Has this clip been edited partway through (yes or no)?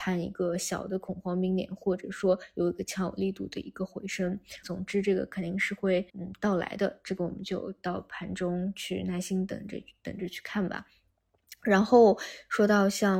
yes